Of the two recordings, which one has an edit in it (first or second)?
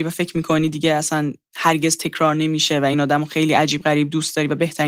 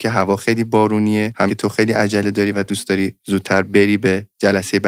second